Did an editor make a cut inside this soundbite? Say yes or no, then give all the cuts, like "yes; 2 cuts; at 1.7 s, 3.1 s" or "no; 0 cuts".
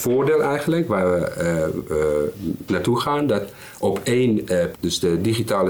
yes; 2 cuts; at 2.7 s, 4.7 s